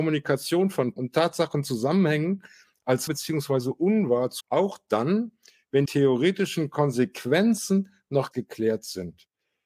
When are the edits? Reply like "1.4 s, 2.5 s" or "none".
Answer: 1.0 s, 3.1 s, 4.4 s, 5.9 s, 8.3 s